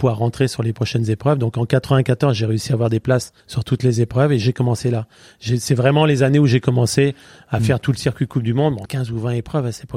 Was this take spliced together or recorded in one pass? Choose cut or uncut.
cut